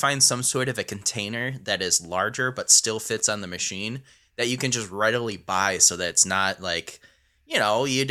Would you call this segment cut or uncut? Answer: uncut